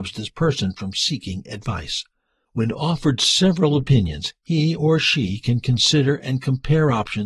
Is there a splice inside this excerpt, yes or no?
no